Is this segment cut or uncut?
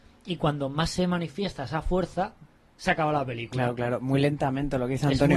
uncut